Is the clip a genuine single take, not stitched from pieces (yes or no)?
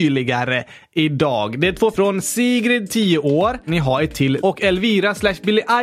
no